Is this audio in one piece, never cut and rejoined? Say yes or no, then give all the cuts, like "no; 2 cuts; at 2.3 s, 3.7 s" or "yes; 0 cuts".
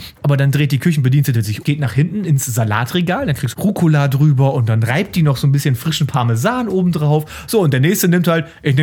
no; 2 cuts; at 1.6 s, 3.5 s